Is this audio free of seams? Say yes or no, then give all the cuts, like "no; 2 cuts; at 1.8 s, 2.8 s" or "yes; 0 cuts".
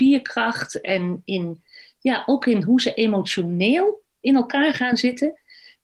yes; 0 cuts